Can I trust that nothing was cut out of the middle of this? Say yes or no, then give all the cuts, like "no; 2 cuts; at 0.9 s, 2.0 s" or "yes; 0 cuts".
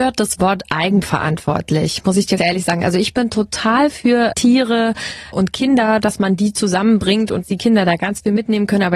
no; 4 cuts; at 2.4 s, 4.3 s, 5.3 s, 7.4 s